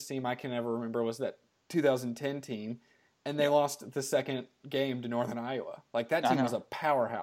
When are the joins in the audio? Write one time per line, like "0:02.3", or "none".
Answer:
none